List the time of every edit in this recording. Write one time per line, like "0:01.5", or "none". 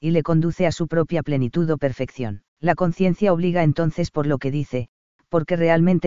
0:02.5